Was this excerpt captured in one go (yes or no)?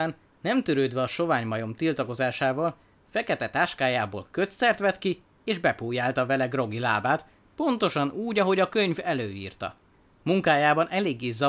yes